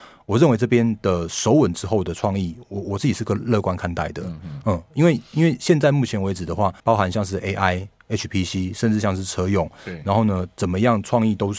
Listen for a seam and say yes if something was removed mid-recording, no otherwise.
yes